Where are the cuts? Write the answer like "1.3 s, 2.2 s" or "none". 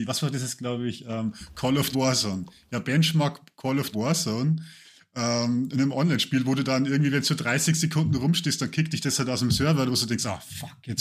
1.9 s, 3.9 s